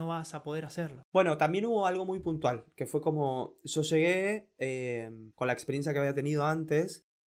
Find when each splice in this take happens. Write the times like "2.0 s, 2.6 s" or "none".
5.3 s